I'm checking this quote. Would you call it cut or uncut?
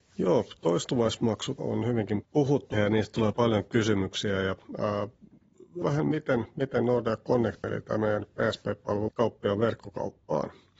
cut